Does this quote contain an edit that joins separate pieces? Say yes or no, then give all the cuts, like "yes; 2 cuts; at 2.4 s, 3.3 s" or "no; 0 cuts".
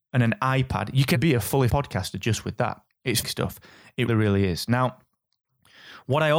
yes; 4 cuts; at 1.1 s, 1.7 s, 3.2 s, 4.1 s